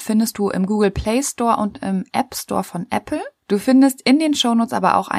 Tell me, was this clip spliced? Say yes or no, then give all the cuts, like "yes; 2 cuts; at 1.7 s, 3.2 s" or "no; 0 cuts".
no; 0 cuts